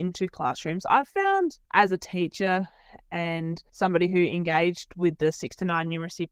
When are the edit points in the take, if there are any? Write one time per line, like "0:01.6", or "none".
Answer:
0:01.6